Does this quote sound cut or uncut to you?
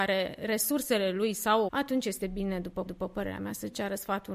cut